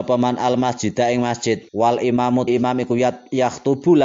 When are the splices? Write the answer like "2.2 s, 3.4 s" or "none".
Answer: 1.7 s, 2.5 s